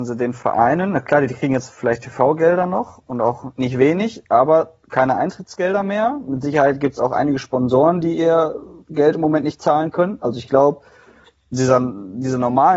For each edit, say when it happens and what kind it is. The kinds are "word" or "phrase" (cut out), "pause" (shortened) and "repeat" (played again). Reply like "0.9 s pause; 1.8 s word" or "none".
11.5 s word